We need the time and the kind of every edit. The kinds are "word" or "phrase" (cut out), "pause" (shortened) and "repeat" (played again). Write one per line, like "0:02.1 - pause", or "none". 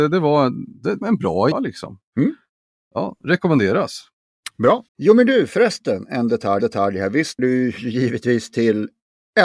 0:01.0 - word
0:01.5 - word
0:02.1 - pause
0:04.9 - pause
0:06.6 - repeat
0:07.4 - word